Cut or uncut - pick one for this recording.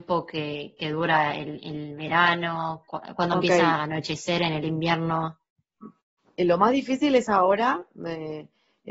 uncut